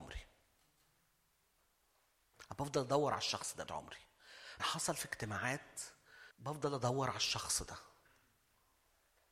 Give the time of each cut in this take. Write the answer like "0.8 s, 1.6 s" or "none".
3.7 s, 4.6 s, 6.3 s